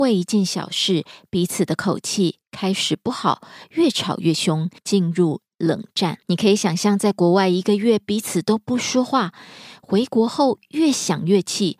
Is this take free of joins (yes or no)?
no